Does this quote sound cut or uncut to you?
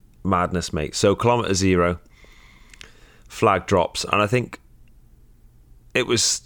uncut